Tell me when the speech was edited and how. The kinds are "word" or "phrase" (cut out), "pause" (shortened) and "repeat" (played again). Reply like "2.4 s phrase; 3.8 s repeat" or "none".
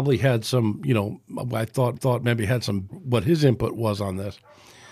1.9 s repeat; 2.9 s phrase

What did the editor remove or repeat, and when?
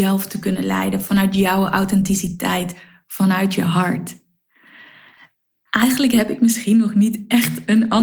none

